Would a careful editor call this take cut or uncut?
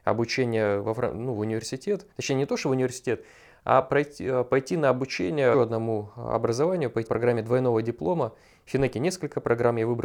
cut